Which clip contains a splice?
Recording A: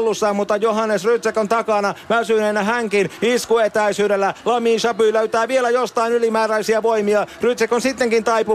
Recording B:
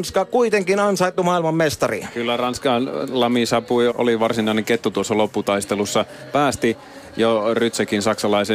B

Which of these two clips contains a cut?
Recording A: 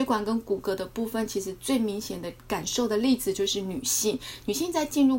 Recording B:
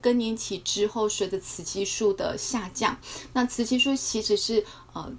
A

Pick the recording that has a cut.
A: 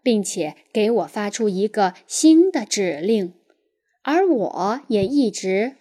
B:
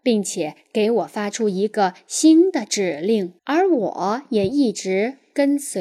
B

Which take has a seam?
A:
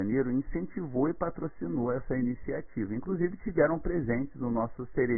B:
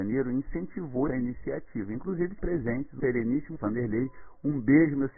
B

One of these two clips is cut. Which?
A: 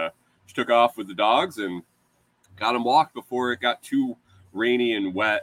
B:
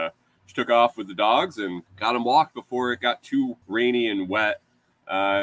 B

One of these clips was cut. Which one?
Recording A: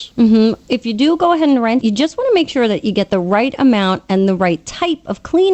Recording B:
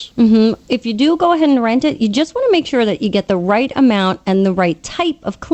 A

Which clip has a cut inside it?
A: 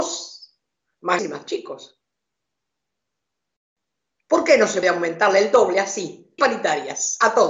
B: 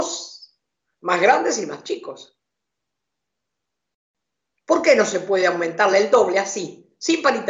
A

